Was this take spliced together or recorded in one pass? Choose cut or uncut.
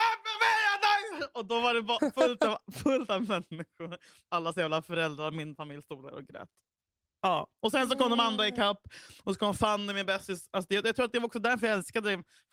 uncut